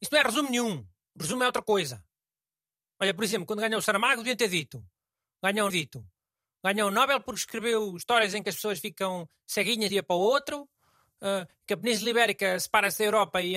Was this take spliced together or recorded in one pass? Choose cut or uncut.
cut